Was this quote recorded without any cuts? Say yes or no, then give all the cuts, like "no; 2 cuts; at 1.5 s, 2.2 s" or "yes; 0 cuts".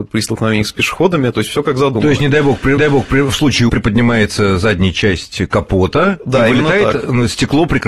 no; 2 cuts; at 2.8 s, 3.7 s